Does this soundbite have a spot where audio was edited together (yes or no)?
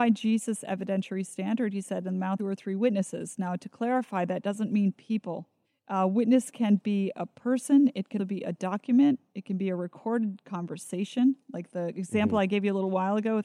yes